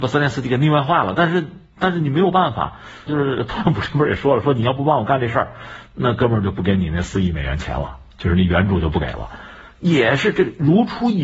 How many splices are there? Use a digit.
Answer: 1